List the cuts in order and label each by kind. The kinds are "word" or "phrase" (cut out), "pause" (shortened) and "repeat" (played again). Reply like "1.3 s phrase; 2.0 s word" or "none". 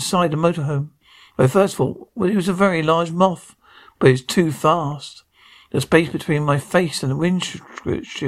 none